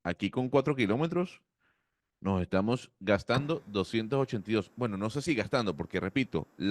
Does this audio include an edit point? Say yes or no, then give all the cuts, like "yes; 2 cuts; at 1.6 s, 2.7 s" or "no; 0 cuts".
no; 0 cuts